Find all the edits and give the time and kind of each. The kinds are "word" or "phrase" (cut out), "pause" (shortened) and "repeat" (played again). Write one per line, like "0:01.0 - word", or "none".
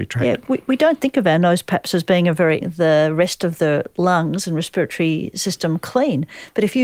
0:02.6 - phrase